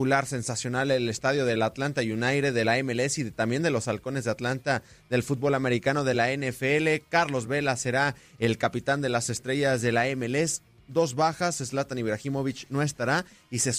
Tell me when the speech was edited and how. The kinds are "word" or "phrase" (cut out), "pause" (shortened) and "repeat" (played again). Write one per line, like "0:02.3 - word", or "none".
none

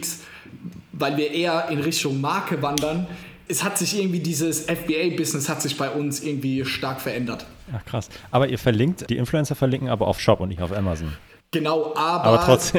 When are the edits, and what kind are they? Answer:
0:03.5 - word
0:09.1 - word
0:10.2 - word

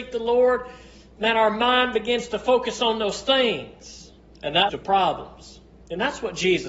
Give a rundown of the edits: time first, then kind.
0:04.3 - pause
0:04.7 - phrase

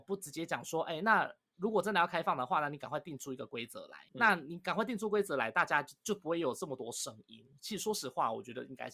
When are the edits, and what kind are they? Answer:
0:04.1 - pause

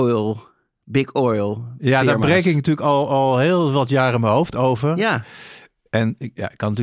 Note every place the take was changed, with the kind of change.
none

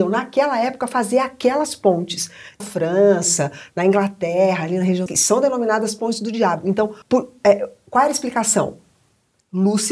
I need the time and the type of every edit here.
0:02.6 - phrase
0:05.1 - phrase
0:07.0 - pause

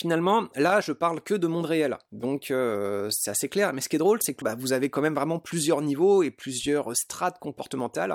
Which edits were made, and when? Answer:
0:04.4 - phrase

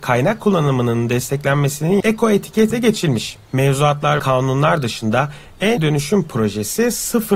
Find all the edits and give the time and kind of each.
0:02.0 - word
0:02.7 - word
0:04.2 - word
0:05.8 - phrase

